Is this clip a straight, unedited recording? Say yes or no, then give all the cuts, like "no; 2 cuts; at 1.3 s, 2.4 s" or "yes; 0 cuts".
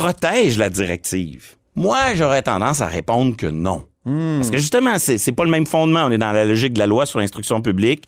yes; 0 cuts